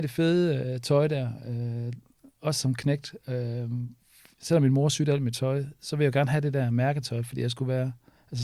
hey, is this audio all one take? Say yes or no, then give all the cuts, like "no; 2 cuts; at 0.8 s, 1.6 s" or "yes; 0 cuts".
yes; 0 cuts